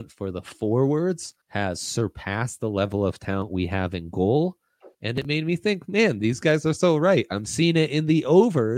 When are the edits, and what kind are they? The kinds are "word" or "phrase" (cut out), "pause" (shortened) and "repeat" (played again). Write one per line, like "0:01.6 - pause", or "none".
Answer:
0:01.4 - pause
0:04.9 - pause